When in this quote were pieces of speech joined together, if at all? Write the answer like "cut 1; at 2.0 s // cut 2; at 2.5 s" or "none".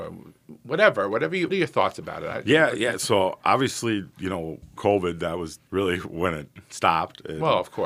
cut 1; at 1.5 s // cut 2; at 4.8 s // cut 3; at 5.7 s